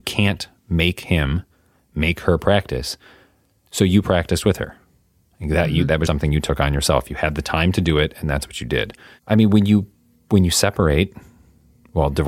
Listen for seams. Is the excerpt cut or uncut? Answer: cut